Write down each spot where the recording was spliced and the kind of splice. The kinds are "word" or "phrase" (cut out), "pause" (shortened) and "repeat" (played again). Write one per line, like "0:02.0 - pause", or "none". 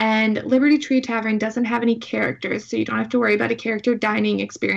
none